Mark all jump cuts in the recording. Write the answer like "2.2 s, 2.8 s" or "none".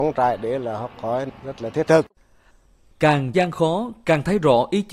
3.3 s